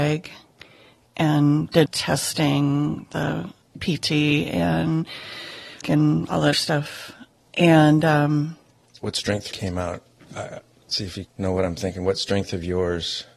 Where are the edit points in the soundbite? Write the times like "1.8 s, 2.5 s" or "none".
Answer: 1.9 s, 3.6 s, 5.8 s, 6.5 s, 9.5 s, 11.2 s